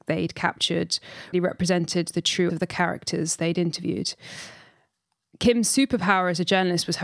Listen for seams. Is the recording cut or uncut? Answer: cut